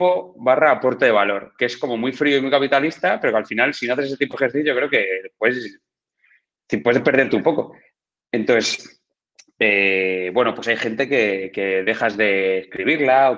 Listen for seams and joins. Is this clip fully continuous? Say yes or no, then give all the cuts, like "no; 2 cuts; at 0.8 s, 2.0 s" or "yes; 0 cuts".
yes; 0 cuts